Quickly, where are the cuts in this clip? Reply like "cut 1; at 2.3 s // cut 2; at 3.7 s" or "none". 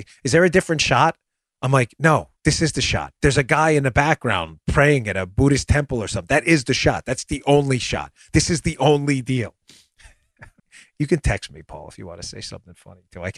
cut 1; at 3.2 s // cut 2; at 10.6 s